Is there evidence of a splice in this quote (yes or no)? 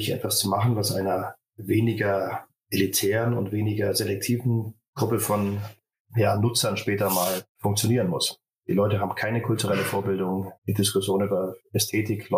yes